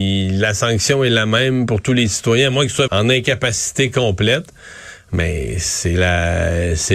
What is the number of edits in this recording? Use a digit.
1